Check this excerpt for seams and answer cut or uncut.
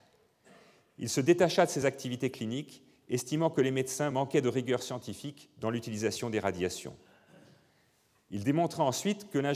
uncut